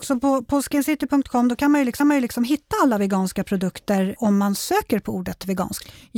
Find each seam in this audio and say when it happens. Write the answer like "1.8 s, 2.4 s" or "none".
2.0 s, 4.2 s